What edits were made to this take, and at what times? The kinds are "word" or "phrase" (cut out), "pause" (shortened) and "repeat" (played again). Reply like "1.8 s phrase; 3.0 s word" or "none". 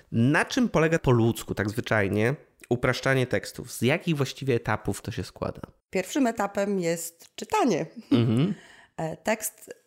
1.0 s word; 5.0 s word; 5.8 s pause